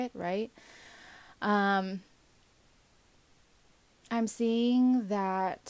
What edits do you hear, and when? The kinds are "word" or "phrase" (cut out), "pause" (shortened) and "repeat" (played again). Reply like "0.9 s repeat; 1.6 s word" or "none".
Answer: none

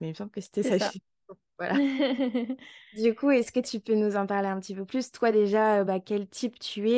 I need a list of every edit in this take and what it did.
none

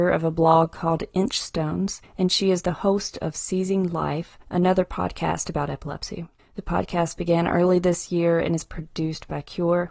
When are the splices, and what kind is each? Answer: none

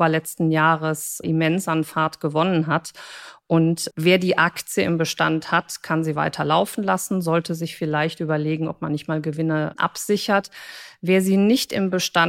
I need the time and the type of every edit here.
1.2 s word; 3.9 s word; 9.7 s word

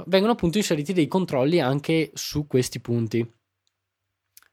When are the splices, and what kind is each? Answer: none

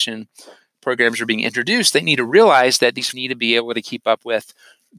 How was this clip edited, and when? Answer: 3.1 s word

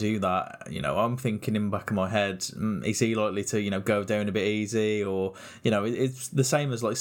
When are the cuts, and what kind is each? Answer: none

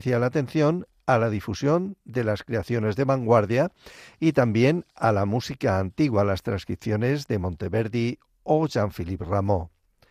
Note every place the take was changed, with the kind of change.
none

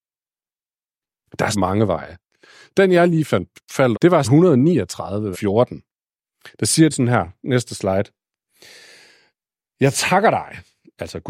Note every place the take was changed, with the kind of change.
1.5 s word; 3.9 s word; 4.2 s word; 5.3 s word; 6.9 s word

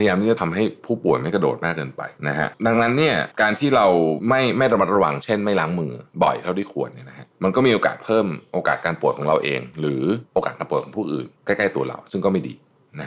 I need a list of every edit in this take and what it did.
2.2 s pause; 7.3 s pause; 11.3 s pause

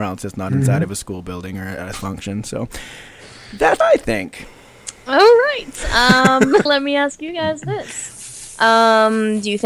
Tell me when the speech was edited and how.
1.9 s word; 3.8 s word; 6.7 s word

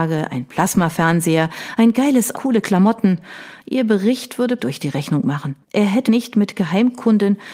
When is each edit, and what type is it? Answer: 2.3 s word; 4.6 s phrase; 5.6 s pause; 6.1 s word

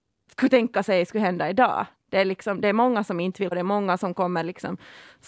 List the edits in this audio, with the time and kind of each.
3.5 s word

